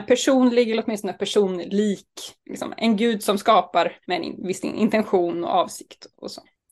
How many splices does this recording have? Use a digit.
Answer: 2